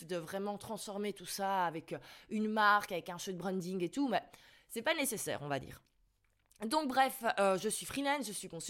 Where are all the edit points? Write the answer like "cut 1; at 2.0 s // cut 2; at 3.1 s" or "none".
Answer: none